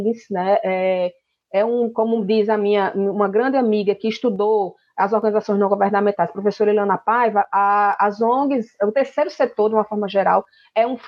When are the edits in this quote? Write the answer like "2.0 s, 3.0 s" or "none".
none